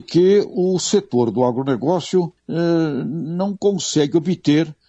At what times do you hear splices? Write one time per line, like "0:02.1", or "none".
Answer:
0:02.4

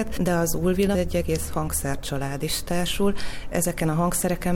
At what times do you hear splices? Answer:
0:00.9

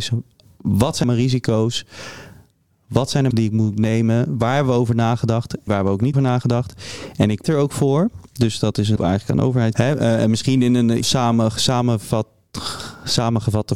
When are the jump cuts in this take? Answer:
0:01.0
0:03.3
0:05.7
0:06.1
0:07.4
0:09.0
0:09.7
0:11.0

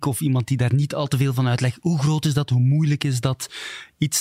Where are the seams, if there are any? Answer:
none

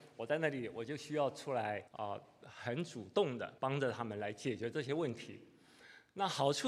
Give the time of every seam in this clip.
0:01.9
0:03.6

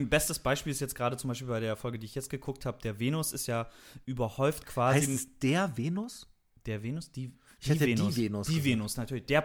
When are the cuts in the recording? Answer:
0:04.0

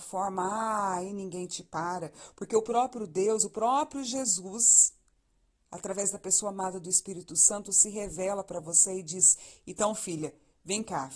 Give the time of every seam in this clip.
none

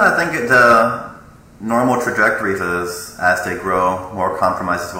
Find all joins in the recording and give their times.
0:02.6

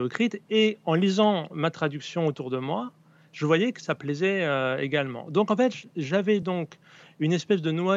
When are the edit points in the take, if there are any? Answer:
none

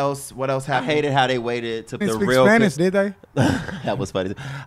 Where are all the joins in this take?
0:02.0
0:02.8

